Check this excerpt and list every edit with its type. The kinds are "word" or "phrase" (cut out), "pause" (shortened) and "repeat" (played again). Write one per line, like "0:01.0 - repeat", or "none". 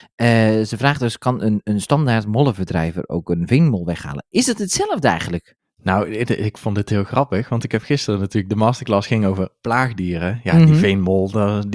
none